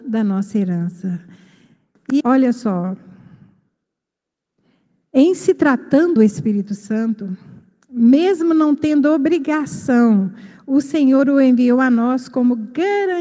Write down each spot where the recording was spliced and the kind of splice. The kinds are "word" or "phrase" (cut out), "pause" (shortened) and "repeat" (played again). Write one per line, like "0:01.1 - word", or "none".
0:02.2 - word
0:06.2 - word